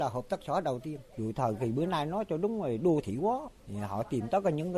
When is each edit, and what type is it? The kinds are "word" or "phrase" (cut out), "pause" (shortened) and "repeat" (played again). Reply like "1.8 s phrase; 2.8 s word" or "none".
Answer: 3.6 s pause